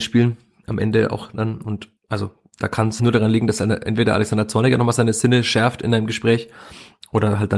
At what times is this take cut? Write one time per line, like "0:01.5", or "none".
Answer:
0:02.0
0:03.0